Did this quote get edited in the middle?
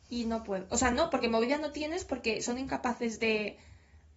no; 0 cuts

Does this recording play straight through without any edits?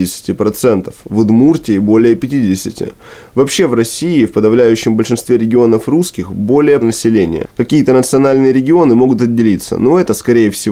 no; 1 cut; at 6.8 s

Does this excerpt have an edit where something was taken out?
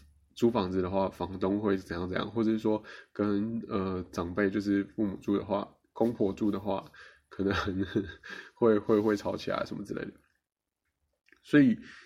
no; 0 cuts

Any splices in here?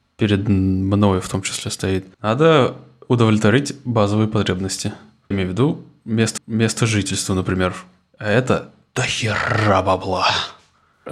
yes; 3 cuts; at 2.1 s, 5.3 s, 6.4 s

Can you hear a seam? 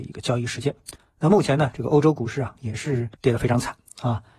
yes; 1 cut; at 3.1 s

